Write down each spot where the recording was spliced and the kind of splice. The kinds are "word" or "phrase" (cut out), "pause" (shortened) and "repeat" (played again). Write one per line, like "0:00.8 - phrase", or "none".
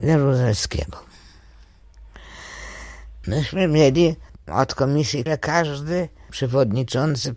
0:04.4 - word
0:05.3 - word